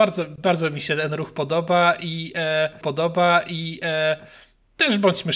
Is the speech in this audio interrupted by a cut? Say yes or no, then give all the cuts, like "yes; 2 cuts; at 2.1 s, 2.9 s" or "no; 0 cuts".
yes; 1 cut; at 2.8 s